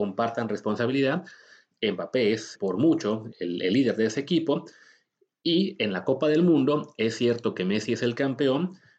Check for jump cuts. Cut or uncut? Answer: cut